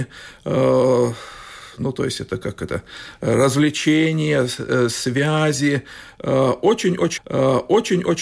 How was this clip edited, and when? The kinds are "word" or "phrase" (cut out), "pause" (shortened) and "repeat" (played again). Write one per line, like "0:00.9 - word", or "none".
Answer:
0:07.2 - repeat